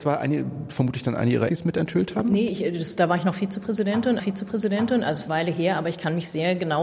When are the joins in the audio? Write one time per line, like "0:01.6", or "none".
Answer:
0:01.5
0:04.2
0:05.3